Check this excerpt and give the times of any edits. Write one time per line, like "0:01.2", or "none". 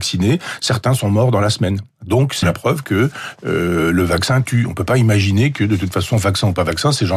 0:02.4